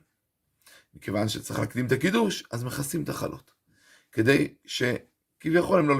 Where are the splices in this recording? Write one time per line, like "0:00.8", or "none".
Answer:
none